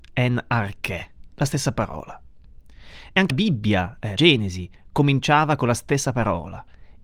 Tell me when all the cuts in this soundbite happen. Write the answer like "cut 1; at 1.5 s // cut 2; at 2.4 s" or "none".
cut 1; at 3.3 s // cut 2; at 4.2 s